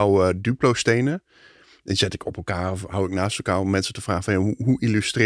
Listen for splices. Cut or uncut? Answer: uncut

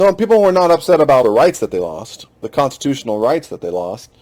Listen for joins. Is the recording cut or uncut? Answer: cut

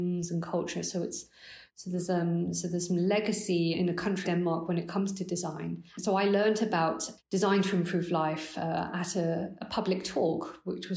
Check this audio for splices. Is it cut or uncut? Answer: cut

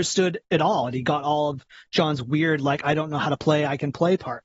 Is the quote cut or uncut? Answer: uncut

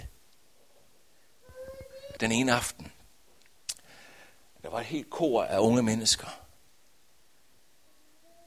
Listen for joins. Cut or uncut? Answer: cut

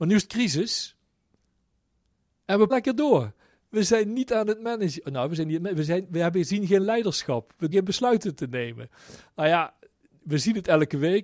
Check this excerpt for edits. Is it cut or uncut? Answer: cut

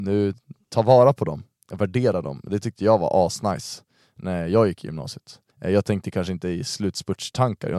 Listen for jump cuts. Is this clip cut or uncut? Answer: cut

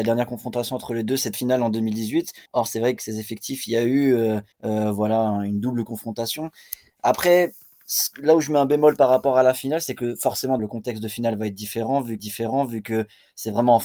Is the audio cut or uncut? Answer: cut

